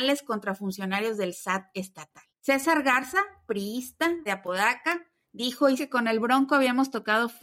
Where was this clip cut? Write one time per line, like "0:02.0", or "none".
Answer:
0:02.3
0:04.3
0:05.8